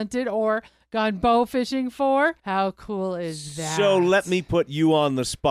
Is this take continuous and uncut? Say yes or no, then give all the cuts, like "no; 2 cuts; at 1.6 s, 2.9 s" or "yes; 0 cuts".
no; 1 cut; at 2.4 s